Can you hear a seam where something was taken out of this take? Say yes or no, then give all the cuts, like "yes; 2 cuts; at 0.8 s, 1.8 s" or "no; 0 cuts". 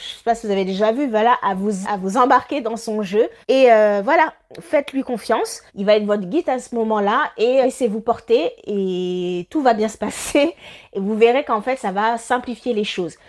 yes; 4 cuts; at 1.8 s, 3.4 s, 5.7 s, 7.6 s